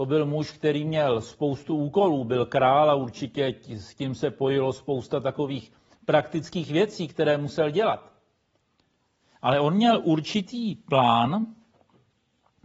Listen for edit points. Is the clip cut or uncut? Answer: uncut